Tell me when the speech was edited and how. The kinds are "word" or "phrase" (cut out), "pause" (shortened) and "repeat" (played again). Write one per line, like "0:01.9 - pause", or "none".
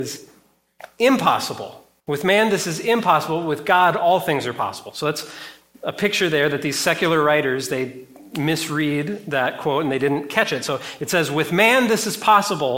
0:02.0 - pause